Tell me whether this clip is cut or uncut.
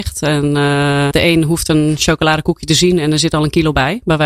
cut